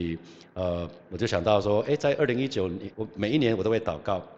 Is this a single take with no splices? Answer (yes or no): no